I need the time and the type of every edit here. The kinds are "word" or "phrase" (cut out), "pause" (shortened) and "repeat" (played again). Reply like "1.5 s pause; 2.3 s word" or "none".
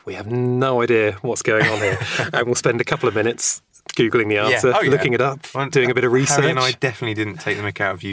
none